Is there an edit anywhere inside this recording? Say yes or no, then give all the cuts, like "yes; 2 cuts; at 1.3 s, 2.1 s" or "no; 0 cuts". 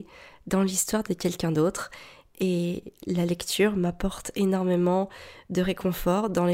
no; 0 cuts